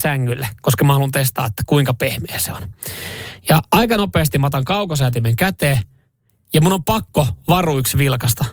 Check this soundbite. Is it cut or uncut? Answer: uncut